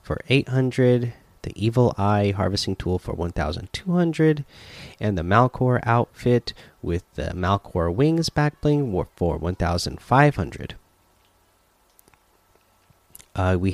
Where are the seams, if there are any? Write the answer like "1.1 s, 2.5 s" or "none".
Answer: none